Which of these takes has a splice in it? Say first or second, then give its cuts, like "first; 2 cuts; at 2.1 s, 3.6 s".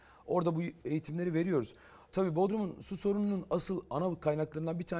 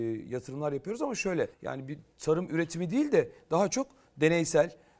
second; 1 cut; at 1.5 s